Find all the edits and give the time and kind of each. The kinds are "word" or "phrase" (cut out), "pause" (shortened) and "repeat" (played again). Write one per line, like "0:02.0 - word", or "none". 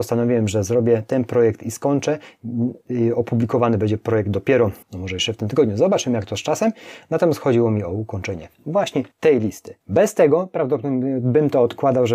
0:04.8 - pause
0:09.1 - pause
0:09.8 - pause